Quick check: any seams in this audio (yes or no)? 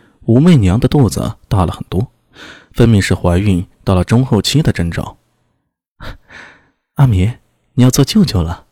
no